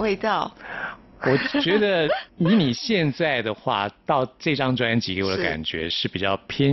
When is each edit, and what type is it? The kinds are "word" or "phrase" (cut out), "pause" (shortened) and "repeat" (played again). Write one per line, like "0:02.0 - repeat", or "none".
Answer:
0:02.3 - pause